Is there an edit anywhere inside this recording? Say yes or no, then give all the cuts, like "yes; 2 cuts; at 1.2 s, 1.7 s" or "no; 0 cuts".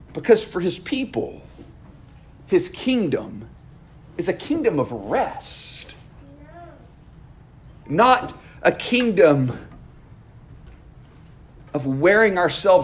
no; 0 cuts